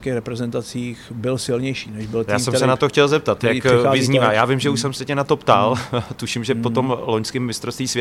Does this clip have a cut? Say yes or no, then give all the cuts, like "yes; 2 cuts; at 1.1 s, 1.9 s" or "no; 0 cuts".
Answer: yes; 1 cut; at 2.3 s